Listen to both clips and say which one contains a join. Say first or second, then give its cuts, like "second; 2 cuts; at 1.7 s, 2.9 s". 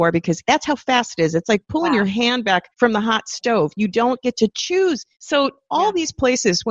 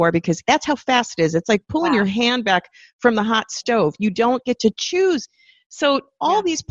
first; 2 cuts; at 2.7 s, 5.1 s